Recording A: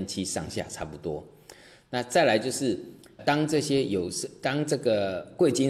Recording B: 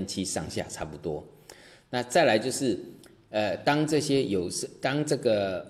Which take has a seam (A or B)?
A